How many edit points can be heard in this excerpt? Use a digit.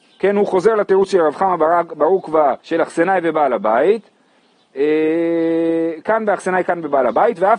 1